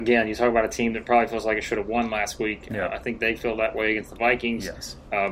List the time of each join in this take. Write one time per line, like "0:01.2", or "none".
none